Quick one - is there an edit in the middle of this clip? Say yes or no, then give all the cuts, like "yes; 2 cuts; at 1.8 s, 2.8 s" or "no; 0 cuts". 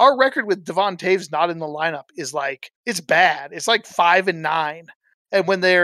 yes; 1 cut; at 2.8 s